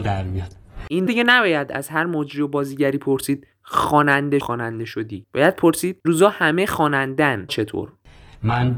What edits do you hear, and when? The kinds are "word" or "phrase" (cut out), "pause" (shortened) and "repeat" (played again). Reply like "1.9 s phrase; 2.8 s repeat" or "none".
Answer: 1.1 s word; 4.4 s phrase; 6.0 s word; 7.5 s word